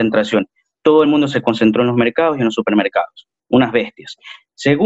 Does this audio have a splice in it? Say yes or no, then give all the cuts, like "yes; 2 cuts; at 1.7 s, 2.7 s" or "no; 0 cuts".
no; 0 cuts